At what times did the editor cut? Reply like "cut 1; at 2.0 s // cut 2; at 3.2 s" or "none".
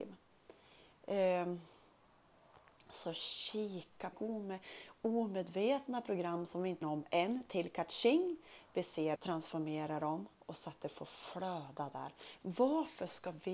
cut 1; at 4.1 s // cut 2; at 6.8 s // cut 3; at 9.2 s